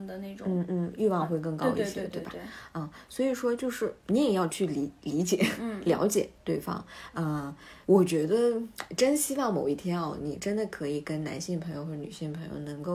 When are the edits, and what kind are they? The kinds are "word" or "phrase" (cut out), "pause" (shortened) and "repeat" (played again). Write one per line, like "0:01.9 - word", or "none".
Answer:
0:04.0 - pause
0:07.8 - pause